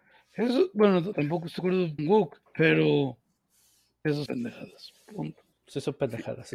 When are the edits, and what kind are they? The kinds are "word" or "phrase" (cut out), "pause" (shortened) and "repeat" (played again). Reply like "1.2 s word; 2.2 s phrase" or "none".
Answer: 1.1 s word; 1.6 s word; 2.0 s word; 2.4 s pause; 4.3 s word; 5.5 s pause